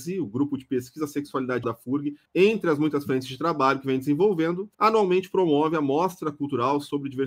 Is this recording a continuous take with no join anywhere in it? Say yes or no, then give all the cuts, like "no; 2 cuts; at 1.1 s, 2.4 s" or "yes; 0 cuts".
no; 3 cuts; at 1.6 s, 2.3 s, 4.7 s